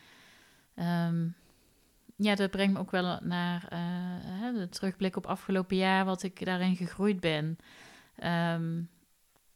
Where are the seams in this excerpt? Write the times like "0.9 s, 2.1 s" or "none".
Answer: none